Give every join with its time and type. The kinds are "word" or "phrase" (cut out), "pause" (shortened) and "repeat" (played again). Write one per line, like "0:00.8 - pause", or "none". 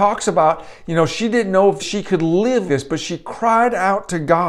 0:01.8 - word
0:02.7 - word